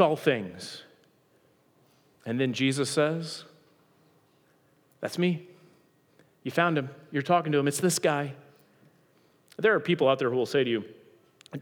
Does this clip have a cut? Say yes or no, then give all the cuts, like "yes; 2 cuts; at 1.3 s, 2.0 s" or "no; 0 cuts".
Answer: no; 0 cuts